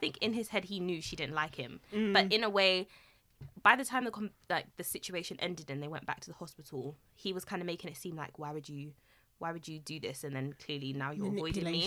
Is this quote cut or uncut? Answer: uncut